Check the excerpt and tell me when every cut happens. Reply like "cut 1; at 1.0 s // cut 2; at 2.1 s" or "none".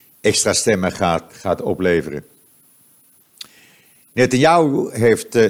cut 1; at 1.3 s